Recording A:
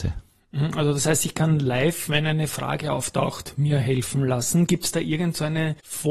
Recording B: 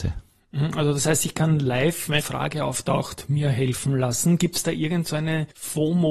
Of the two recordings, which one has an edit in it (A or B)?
B